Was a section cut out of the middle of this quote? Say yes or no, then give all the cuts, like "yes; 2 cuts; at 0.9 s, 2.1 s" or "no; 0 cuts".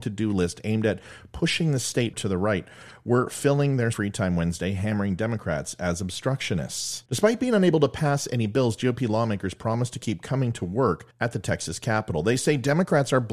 yes; 4 cuts; at 2.1 s, 3.9 s, 7.1 s, 11.1 s